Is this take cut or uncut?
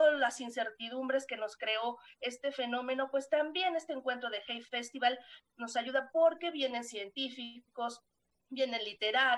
uncut